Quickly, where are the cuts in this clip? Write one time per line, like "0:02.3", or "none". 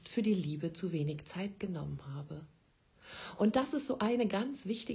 none